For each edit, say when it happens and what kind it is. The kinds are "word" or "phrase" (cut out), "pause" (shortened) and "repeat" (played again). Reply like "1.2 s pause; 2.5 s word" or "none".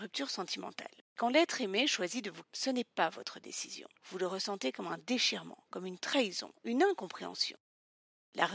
1.1 s pause; 2.4 s word; 4.0 s pause